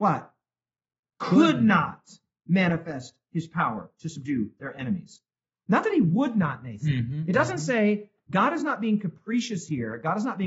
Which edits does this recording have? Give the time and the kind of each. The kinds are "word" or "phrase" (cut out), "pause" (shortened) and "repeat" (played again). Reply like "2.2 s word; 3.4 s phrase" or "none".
none